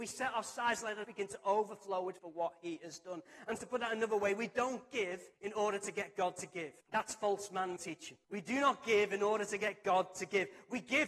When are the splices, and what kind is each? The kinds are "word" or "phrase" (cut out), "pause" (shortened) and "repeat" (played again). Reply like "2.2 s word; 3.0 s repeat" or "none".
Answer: 1.0 s phrase; 2.2 s word; 3.6 s word; 5.3 s pause; 6.8 s pause; 7.8 s word; 8.2 s pause